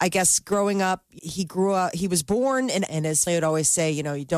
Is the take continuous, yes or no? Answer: no